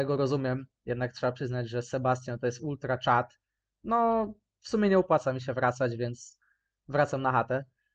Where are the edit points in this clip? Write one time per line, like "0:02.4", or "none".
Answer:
none

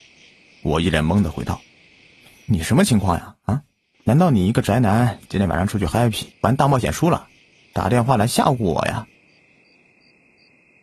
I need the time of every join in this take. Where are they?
0:03.9
0:06.3

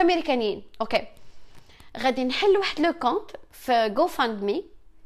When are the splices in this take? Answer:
none

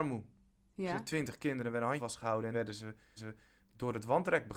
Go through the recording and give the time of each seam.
0:02.0
0:02.5
0:03.2

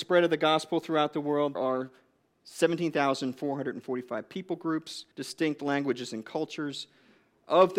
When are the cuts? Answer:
0:01.5
0:05.1

